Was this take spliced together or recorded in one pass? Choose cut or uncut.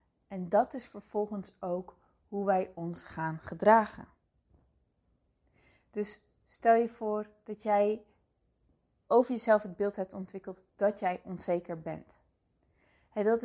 uncut